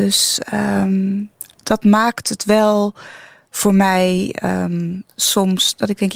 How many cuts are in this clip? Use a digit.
0